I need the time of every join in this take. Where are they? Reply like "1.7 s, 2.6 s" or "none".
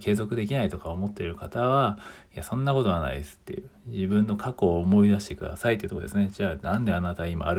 none